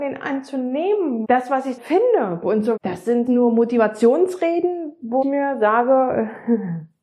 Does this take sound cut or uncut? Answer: cut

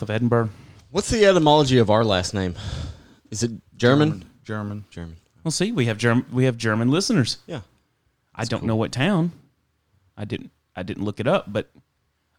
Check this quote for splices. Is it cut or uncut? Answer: uncut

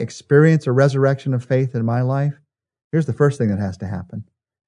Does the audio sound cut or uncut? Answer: uncut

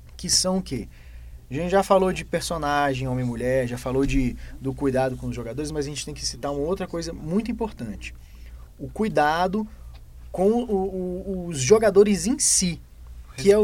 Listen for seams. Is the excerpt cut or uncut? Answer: uncut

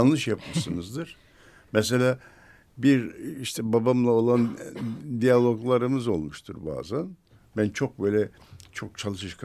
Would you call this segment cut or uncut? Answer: uncut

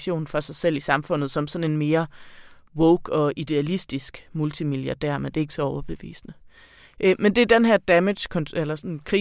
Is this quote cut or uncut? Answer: uncut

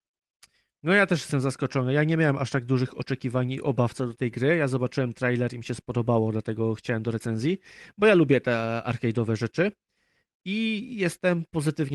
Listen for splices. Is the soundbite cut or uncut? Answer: uncut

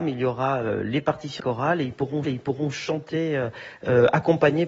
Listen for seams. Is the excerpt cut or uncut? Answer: cut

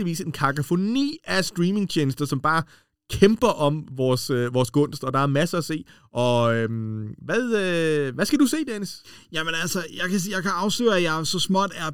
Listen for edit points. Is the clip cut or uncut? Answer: uncut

